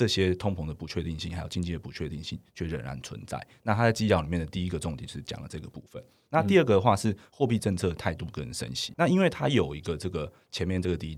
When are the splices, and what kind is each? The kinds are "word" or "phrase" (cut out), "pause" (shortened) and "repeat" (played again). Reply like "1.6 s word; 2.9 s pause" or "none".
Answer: 8.9 s word